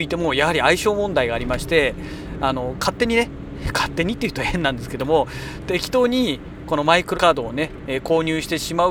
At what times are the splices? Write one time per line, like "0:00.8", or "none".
0:07.1